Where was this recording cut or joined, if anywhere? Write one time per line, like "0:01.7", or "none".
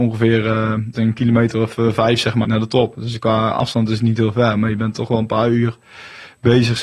0:00.9
0:02.4

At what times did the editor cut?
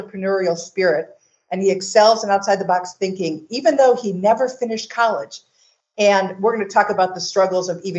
none

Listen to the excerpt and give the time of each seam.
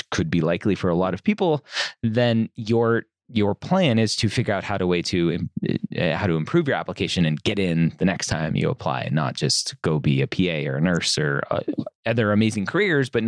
none

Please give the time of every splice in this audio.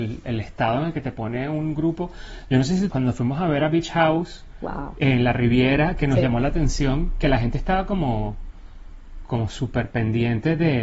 0:02.9

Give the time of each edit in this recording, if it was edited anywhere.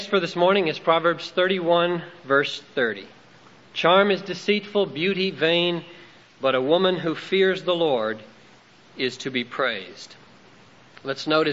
none

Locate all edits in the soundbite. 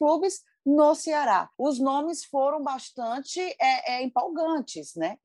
0:01.5

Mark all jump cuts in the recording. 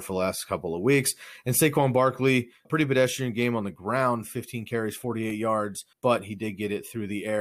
0:02.6
0:05.9

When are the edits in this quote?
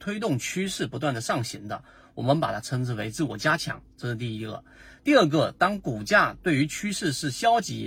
none

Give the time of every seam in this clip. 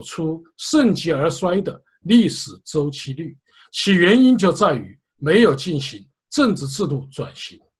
none

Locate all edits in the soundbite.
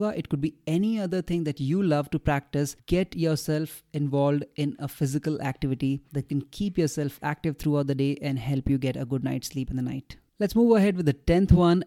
none

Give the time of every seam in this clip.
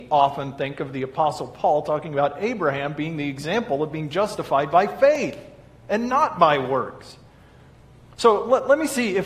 none

